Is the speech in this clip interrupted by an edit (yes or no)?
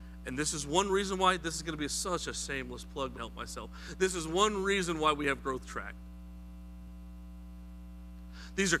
yes